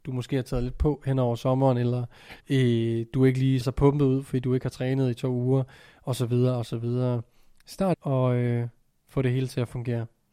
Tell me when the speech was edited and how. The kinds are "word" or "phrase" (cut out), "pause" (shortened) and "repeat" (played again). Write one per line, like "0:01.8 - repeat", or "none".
0:02.4 - pause
0:03.6 - word
0:07.9 - phrase